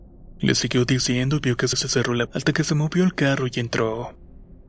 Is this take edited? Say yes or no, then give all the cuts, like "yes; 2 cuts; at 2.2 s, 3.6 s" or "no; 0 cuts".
yes; 2 cuts; at 1.7 s, 2.3 s